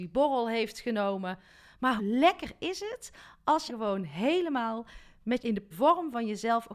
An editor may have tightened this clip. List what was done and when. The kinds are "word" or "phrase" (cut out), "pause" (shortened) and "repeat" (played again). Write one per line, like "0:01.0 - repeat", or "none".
0:02.0 - word
0:03.7 - word
0:05.4 - word
0:05.7 - word